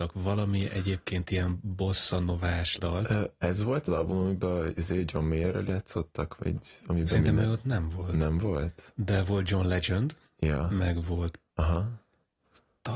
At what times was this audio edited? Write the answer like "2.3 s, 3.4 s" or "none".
2.8 s, 3.9 s, 5.7 s, 6.4 s, 11.5 s